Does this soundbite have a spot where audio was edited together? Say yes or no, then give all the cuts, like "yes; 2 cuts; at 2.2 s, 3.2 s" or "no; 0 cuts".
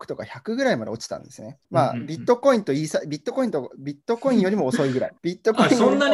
yes; 2 cuts; at 1.6 s, 5.2 s